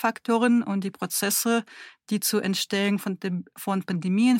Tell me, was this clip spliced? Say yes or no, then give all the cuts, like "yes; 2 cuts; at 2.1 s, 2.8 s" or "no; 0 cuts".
no; 0 cuts